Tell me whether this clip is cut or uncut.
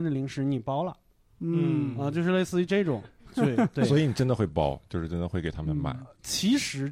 uncut